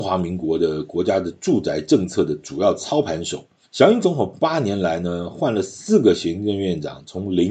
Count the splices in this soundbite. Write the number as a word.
one